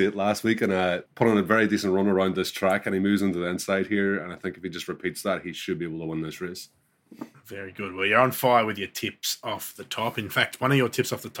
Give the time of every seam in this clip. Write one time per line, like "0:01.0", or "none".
0:01.1